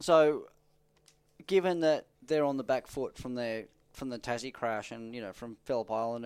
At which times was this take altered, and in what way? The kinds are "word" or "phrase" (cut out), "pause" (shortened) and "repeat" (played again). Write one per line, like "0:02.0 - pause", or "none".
0:02.1 - pause